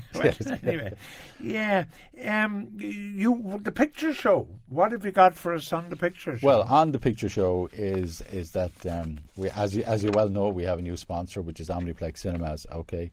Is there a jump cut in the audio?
yes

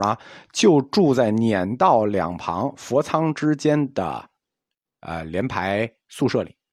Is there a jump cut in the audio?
no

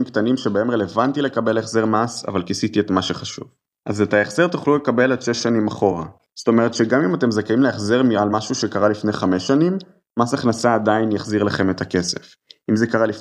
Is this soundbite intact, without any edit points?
yes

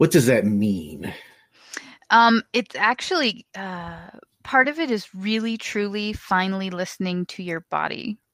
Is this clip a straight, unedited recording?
yes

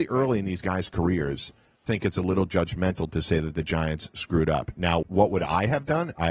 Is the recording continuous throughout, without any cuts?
no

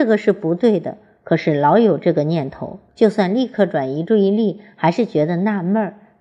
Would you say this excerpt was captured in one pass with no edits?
no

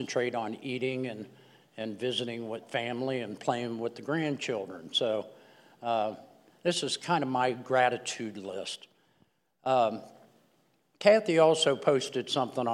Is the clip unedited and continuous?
yes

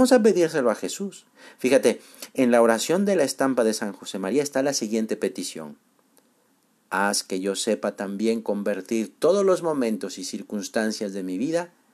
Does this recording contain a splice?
no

